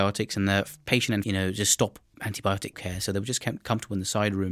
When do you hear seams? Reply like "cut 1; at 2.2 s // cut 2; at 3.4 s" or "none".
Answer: cut 1; at 1.2 s // cut 2; at 2.1 s // cut 3; at 2.7 s